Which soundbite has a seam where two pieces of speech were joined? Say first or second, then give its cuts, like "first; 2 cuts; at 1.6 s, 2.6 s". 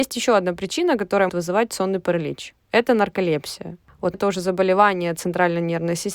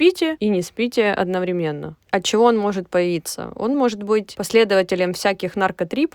first; 2 cuts; at 1.3 s, 4.1 s